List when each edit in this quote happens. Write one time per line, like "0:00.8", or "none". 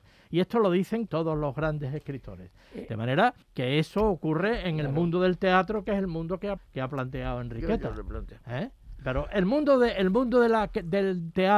0:01.1
0:03.4
0:06.6